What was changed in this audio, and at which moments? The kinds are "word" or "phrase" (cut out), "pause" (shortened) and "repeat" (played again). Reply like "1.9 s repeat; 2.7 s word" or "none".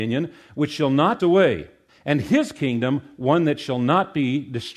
1.2 s word; 1.9 s pause